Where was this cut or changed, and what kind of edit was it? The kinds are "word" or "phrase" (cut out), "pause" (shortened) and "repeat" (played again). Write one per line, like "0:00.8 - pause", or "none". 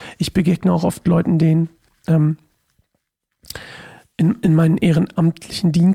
none